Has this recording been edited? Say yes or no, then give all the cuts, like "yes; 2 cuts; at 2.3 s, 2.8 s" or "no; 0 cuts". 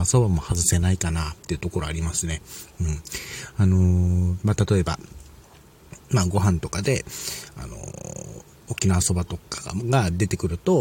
yes; 1 cut; at 8.5 s